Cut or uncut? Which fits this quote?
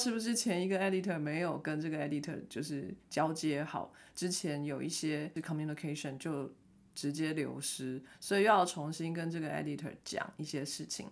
uncut